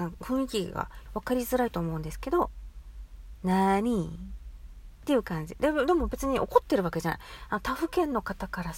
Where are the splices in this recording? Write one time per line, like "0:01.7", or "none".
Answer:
0:01.1